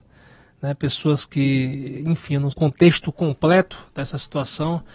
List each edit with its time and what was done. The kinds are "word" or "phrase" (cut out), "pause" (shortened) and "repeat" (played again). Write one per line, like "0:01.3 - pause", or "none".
0:02.5 - phrase